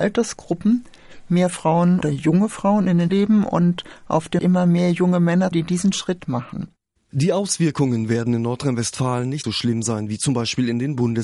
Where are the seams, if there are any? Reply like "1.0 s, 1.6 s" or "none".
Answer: 2.0 s, 3.1 s, 4.4 s, 5.5 s, 6.2 s, 9.4 s

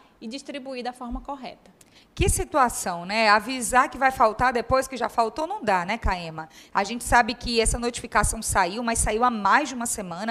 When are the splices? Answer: none

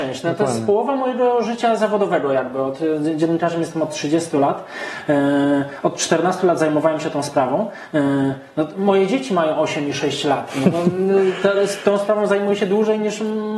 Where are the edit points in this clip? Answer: none

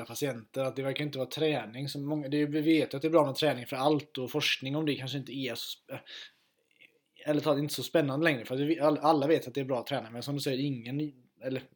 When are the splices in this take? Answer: none

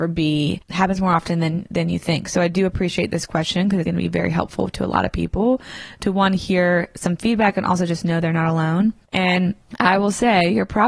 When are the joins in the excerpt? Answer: 3.9 s

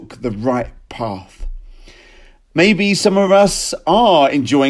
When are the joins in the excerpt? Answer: none

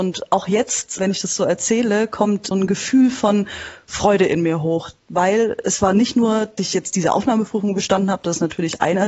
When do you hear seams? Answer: 1.0 s, 2.5 s, 6.6 s

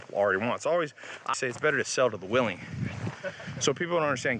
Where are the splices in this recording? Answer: 1.3 s

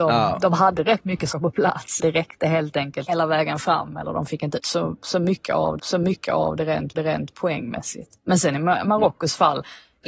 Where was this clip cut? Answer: 1.3 s, 2.0 s, 3.1 s, 4.6 s, 5.8 s, 6.9 s

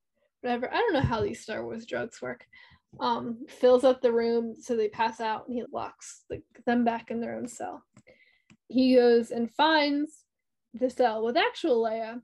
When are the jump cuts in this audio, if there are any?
3.5 s, 5.6 s, 8.7 s

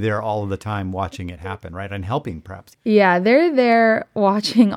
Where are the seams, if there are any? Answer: 2.7 s

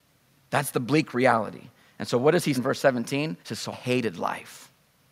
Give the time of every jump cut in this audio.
2.5 s, 3.4 s, 3.7 s

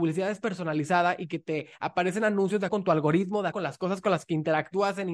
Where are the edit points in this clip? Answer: 2.7 s, 3.5 s

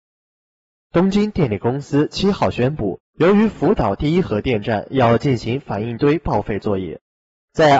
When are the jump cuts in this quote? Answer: 3.1 s

